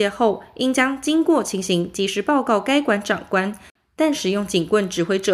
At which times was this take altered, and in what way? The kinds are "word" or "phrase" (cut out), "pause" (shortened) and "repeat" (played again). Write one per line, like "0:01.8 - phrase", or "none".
none